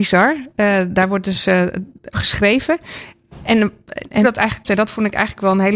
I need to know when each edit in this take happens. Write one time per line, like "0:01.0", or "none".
0:02.1
0:04.2
0:04.6